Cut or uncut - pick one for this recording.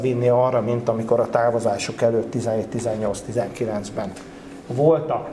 uncut